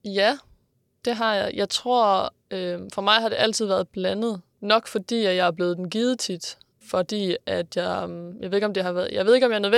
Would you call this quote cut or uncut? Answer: uncut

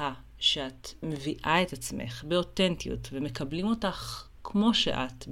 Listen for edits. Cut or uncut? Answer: uncut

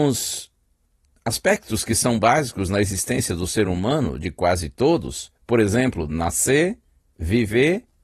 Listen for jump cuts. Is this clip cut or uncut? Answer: uncut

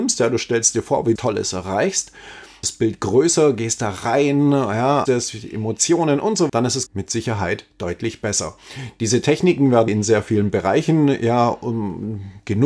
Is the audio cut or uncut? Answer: cut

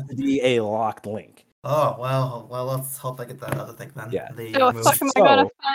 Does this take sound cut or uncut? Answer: cut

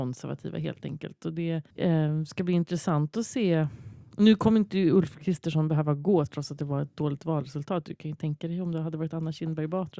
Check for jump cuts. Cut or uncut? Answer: cut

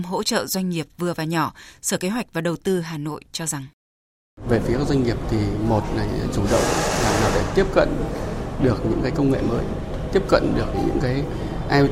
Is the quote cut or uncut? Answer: uncut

